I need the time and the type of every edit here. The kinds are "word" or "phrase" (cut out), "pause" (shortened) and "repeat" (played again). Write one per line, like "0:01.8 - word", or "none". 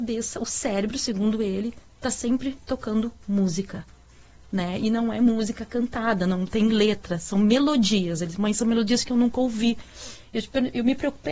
none